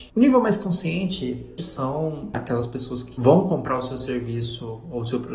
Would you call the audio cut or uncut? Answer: cut